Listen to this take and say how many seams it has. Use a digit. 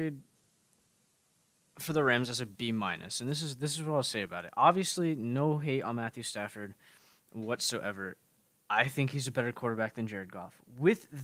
0